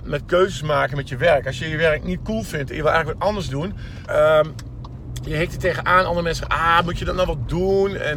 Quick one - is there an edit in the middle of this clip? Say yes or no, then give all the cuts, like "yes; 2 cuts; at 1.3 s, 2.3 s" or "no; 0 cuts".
yes; 1 cut; at 4.1 s